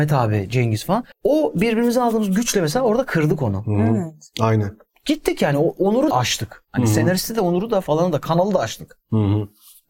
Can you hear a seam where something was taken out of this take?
yes; 2 cuts; at 1.1 s, 6.1 s

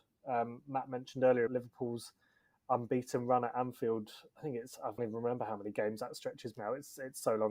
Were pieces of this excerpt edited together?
yes; 3 cuts; at 1.5 s, 5.0 s, 6.5 s

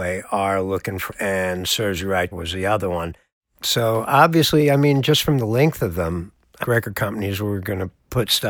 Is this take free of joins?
no; 3 cuts; at 1.1 s, 2.3 s, 6.6 s

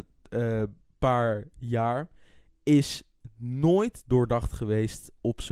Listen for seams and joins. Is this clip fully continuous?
yes; 0 cuts

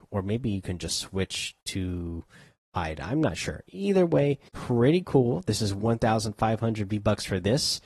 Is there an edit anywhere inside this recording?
yes; 2 cuts; at 1.6 s, 4.5 s

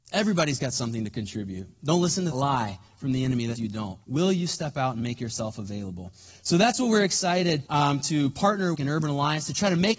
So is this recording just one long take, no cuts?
no; 5 cuts; at 2.3 s, 3.6 s, 4.0 s, 7.7 s, 8.7 s

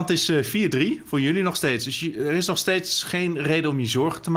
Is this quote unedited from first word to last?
yes; 0 cuts

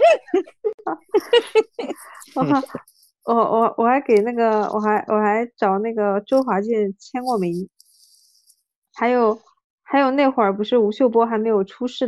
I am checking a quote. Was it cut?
yes; 1 cut; at 8.9 s

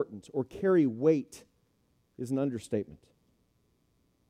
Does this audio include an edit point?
no; 0 cuts

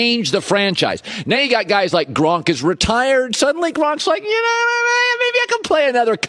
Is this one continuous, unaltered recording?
yes; 0 cuts

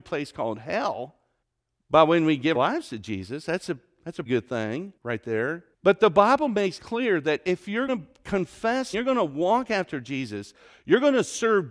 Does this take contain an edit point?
yes; 8 cuts; at 1.4 s, 2.5 s, 4.3 s, 5.0 s, 5.7 s, 6.8 s, 7.9 s, 8.9 s

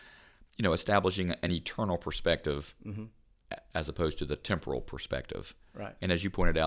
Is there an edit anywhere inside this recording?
no; 0 cuts

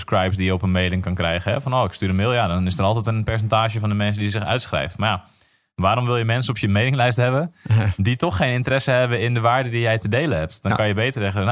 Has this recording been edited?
no; 0 cuts

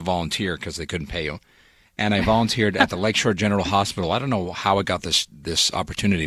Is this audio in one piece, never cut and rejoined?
yes; 0 cuts

